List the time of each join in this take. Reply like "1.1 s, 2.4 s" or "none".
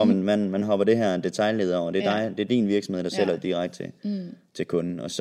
none